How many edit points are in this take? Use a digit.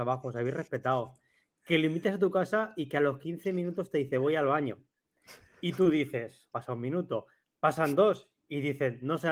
1